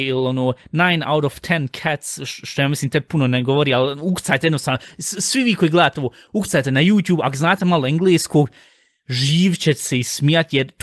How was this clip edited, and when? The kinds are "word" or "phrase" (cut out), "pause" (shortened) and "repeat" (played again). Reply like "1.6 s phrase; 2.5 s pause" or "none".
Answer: none